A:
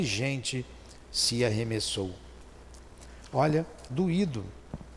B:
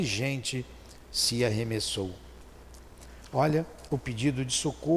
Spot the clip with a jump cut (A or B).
A